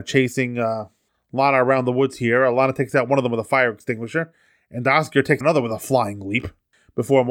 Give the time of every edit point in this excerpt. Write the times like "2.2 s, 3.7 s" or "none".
5.4 s